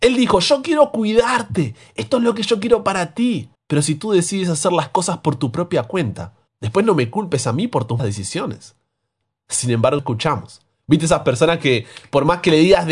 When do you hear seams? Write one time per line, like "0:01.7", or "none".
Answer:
0:03.5
0:06.5
0:08.0
0:10.0